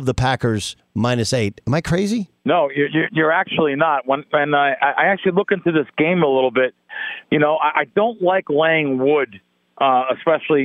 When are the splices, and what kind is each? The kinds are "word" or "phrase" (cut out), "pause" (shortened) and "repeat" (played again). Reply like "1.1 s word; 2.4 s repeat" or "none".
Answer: 2.4 s pause